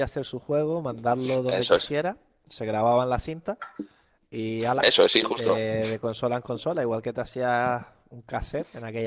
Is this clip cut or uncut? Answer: uncut